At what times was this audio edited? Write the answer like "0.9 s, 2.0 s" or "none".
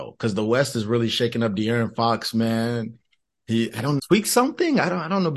4.0 s